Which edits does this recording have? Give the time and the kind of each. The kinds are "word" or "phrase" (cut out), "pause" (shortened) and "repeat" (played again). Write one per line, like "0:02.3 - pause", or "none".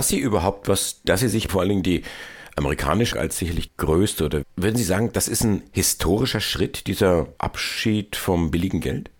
0:01.0 - word
0:01.5 - word
0:03.1 - word
0:03.7 - word
0:04.4 - word
0:07.4 - word